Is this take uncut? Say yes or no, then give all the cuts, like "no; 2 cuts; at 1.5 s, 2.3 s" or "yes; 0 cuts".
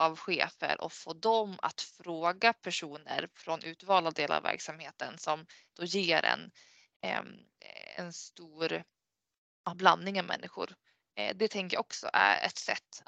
yes; 0 cuts